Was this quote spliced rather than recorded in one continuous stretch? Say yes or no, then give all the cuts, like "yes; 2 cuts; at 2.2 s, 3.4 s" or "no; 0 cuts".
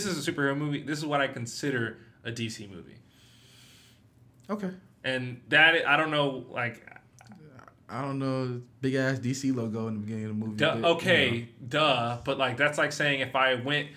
no; 0 cuts